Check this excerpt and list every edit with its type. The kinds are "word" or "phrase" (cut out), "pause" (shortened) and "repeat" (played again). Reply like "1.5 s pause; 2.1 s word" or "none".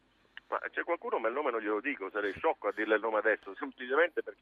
none